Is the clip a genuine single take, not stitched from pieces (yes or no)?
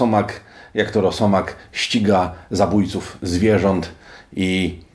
yes